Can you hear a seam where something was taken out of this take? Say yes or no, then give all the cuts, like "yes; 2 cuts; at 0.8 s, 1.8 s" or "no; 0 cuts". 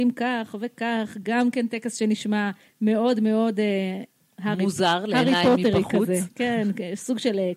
no; 0 cuts